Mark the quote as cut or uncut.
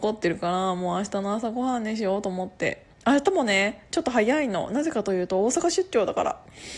cut